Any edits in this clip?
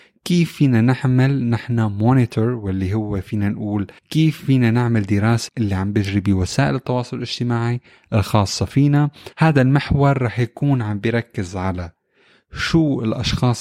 yes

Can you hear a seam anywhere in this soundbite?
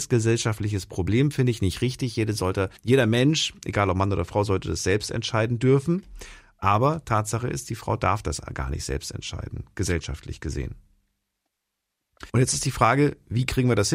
yes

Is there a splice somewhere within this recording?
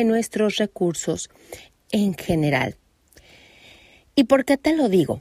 yes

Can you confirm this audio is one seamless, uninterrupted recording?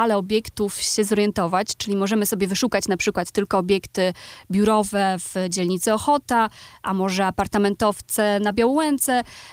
yes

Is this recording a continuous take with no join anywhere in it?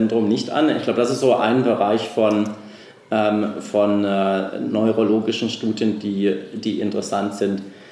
yes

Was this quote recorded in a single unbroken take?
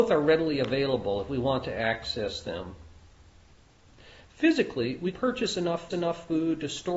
no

